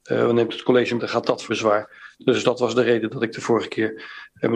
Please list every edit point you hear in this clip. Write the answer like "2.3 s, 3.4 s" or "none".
1.0 s, 1.5 s